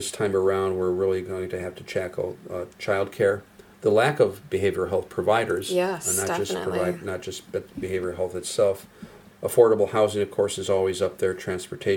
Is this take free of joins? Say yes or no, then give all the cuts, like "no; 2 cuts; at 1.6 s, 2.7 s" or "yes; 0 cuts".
yes; 0 cuts